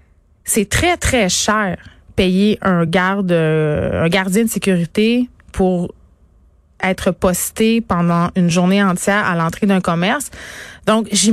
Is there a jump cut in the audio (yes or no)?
no